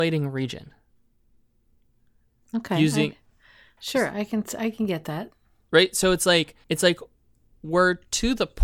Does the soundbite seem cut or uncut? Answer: cut